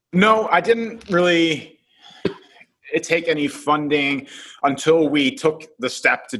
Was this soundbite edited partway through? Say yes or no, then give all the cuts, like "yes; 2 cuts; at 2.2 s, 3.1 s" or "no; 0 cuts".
no; 0 cuts